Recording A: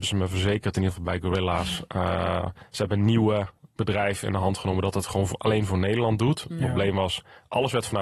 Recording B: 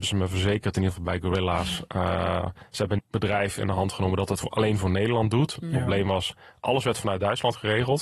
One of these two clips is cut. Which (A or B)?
B